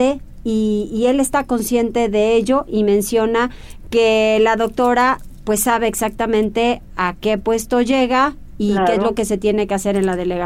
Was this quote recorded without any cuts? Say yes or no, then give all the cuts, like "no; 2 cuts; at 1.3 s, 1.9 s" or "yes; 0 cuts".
yes; 0 cuts